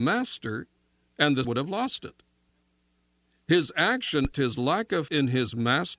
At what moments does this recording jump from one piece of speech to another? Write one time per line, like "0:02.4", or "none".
0:01.4
0:04.3
0:05.1